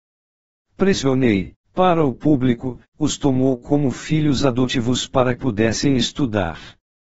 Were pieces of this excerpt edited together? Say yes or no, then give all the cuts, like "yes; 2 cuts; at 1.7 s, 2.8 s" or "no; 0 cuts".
yes; 2 cuts; at 1.6 s, 5.4 s